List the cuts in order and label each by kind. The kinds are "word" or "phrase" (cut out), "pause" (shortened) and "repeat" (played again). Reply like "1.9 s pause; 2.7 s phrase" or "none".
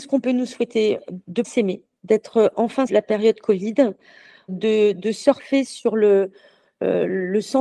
1.4 s word; 2.9 s word; 4.5 s word